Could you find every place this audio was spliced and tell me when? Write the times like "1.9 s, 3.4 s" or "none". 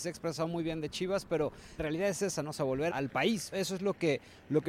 1.8 s, 2.9 s, 3.5 s

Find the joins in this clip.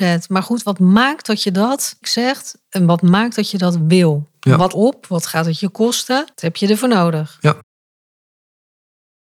2.0 s, 4.7 s, 6.3 s

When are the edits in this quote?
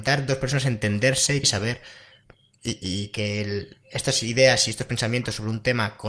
1.4 s

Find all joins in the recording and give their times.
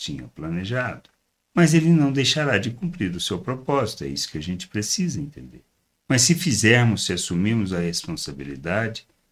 none

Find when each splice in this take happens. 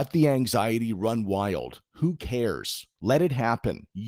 2.9 s

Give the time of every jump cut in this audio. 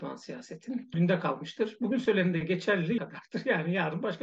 0.9 s, 3.0 s

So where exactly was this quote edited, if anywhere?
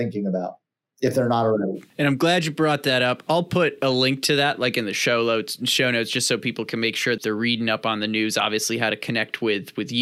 1.9 s, 7.2 s

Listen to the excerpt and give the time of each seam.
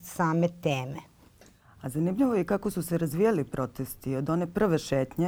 none

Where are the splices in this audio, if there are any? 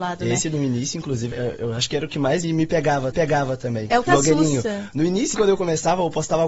1.3 s, 2.4 s, 3.1 s, 4.1 s, 5.3 s

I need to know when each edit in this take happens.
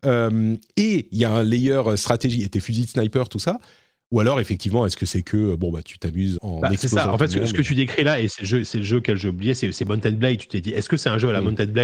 6.4 s

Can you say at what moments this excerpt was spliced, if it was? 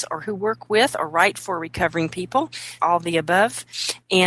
2.8 s

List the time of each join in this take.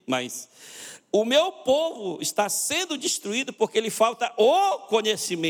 none

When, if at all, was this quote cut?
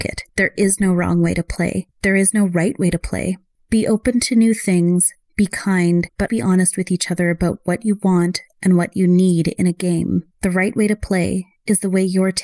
6.3 s

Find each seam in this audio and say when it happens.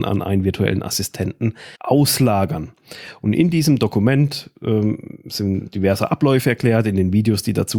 1.7 s

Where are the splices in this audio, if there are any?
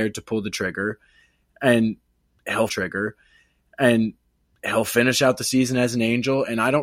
2.7 s

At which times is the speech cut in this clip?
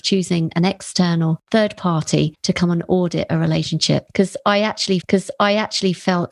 5.0 s

